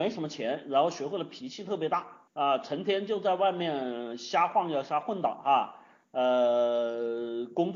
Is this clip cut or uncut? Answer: cut